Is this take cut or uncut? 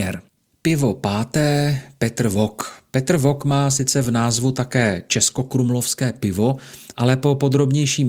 uncut